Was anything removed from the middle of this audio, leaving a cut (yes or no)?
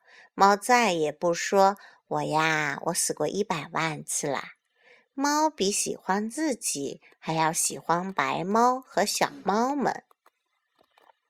no